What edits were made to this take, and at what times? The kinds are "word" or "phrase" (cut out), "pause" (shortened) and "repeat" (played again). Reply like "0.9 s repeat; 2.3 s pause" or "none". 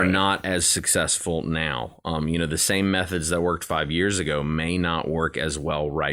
none